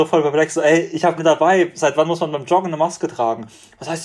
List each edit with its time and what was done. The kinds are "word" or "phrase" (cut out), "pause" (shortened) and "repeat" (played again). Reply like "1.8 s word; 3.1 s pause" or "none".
1.2 s word